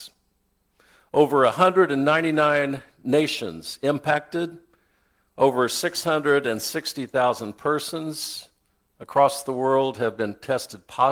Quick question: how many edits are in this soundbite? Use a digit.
0